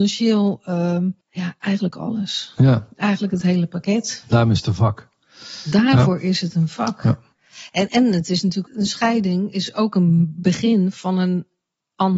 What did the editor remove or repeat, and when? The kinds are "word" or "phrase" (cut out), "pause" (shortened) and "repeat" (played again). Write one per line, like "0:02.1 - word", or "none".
0:01.2 - pause
0:07.9 - word
0:08.7 - word